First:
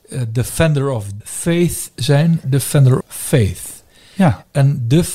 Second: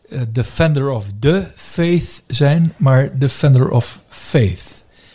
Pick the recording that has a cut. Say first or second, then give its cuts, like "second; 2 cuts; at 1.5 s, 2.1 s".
first; 3 cuts; at 1.2 s, 2.4 s, 3.0 s